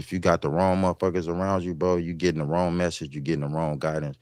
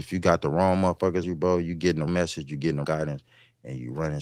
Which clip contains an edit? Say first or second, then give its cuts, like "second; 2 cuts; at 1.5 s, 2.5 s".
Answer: second; 3 cuts; at 1.2 s, 2.1 s, 2.8 s